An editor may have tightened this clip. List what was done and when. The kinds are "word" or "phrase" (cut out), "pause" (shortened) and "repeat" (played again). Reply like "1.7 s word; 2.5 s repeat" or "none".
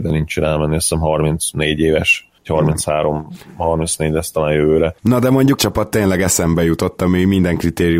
2.4 s pause; 5.0 s pause; 5.6 s word

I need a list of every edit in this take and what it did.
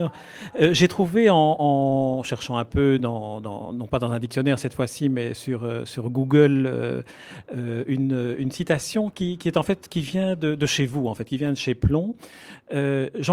none

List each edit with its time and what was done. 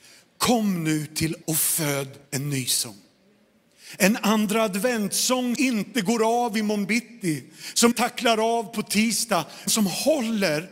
1.4 s phrase; 2.3 s pause; 5.5 s word; 7.9 s word; 9.7 s word

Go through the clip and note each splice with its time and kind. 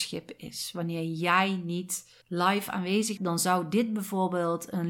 2.2 s pause; 3.2 s word

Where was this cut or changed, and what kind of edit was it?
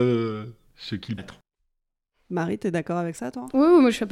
1.2 s word

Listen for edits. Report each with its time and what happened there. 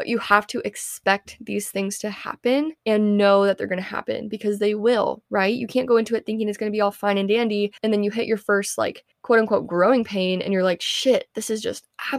2.8 s pause; 7.8 s pause; 9.1 s pause

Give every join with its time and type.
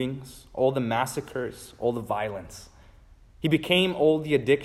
none

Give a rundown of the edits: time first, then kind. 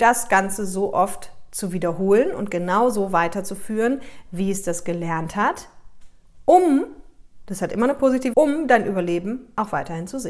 8.3 s word

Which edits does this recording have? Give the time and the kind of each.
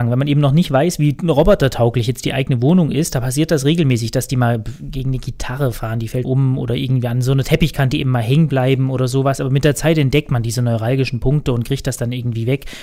6.2 s word

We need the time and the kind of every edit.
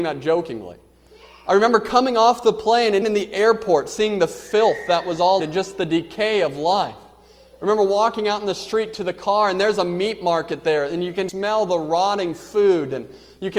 3.0 s word; 5.4 s word; 11.3 s word

